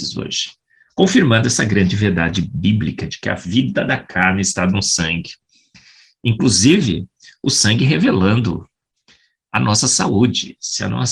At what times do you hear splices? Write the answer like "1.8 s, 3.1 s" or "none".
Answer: none

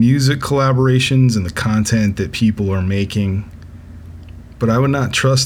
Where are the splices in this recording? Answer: none

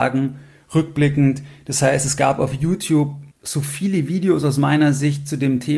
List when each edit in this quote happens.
3.3 s

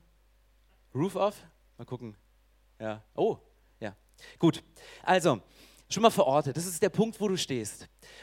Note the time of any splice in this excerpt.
none

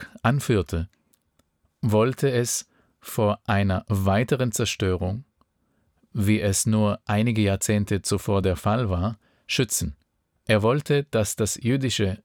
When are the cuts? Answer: none

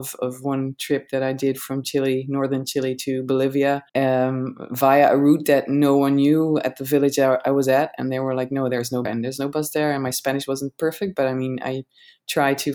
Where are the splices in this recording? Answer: 3.9 s, 9.0 s

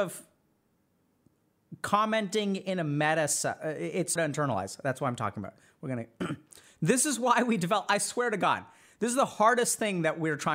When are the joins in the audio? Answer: 4.2 s

